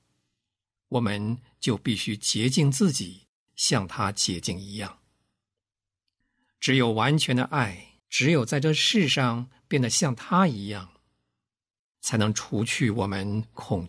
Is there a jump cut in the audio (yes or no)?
yes